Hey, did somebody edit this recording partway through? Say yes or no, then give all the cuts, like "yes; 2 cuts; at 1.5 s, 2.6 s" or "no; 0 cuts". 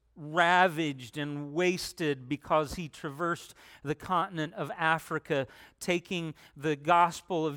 no; 0 cuts